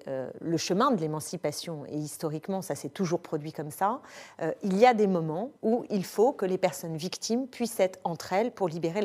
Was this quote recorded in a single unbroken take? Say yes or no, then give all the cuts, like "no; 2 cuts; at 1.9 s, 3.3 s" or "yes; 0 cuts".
no; 1 cut; at 5.6 s